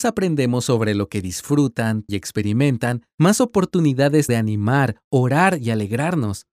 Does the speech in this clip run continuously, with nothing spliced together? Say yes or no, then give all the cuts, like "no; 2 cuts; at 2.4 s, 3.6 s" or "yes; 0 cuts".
no; 2 cuts; at 2.1 s, 4.3 s